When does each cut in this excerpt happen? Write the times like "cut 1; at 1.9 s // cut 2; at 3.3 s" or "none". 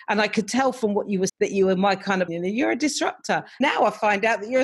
cut 1; at 1.3 s // cut 2; at 2.3 s // cut 3; at 3.6 s